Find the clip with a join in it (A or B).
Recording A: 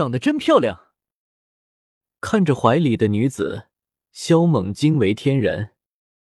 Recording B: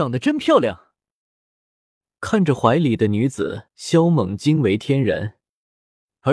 B